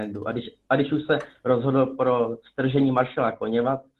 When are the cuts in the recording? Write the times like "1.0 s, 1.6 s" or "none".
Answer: none